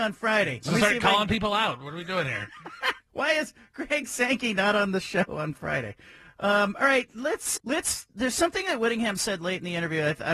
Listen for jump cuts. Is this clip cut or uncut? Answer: cut